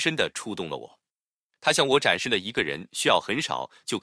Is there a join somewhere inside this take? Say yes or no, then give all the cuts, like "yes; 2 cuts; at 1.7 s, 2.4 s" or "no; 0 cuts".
no; 0 cuts